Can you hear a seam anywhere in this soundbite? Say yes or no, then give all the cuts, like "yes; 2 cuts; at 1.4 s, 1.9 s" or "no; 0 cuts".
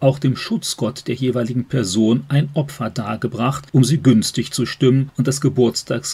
no; 0 cuts